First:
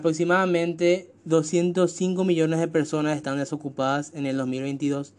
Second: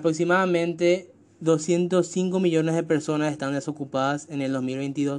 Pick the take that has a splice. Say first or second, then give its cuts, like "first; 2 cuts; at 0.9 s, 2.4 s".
first; 1 cut; at 1.2 s